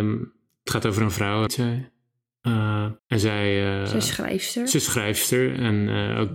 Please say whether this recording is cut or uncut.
cut